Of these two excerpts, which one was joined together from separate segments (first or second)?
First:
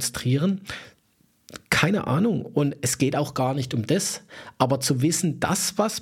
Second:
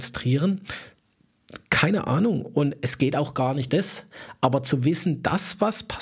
second